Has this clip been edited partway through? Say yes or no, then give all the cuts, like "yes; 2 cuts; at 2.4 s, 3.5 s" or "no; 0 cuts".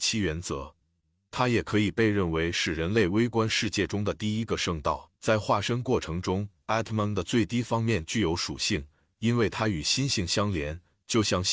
yes; 1 cut; at 5.2 s